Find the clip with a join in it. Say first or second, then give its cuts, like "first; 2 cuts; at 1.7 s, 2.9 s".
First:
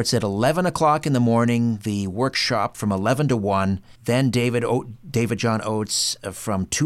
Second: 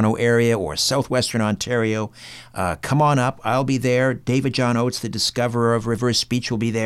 first; 1 cut; at 4.0 s